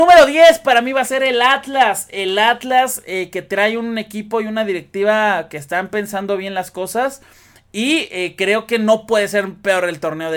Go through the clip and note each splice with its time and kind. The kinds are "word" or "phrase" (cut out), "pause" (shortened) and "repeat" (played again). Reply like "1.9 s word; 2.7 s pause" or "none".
none